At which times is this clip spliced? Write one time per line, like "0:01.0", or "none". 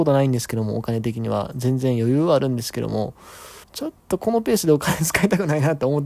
0:03.6
0:04.0